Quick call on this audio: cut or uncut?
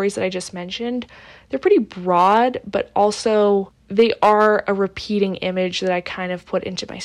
uncut